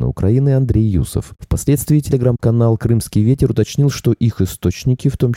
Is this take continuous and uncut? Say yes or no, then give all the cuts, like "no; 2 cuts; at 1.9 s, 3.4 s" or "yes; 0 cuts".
yes; 0 cuts